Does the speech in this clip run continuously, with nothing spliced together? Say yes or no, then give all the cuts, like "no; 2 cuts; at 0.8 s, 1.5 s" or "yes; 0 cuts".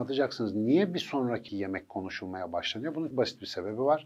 no; 2 cuts; at 1.5 s, 3.1 s